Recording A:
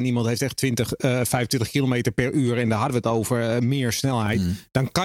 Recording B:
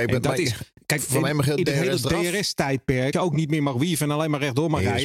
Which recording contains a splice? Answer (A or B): B